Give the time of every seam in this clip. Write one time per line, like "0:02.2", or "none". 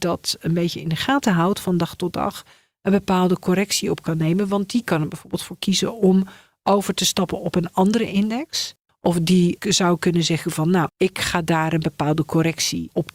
none